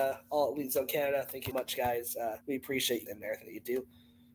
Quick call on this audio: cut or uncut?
cut